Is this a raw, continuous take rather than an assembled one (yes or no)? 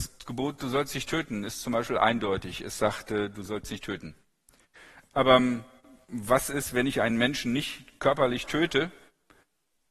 yes